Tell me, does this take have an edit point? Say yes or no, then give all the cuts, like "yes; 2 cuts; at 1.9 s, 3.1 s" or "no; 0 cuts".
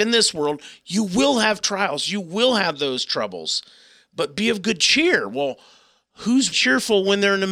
yes; 1 cut; at 6.5 s